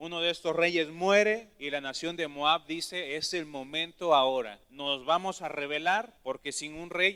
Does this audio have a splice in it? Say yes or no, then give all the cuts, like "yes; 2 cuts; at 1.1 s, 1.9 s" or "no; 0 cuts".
yes; 3 cuts; at 1.5 s, 4.6 s, 6.2 s